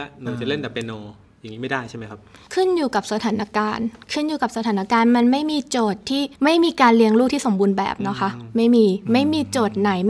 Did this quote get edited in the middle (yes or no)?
yes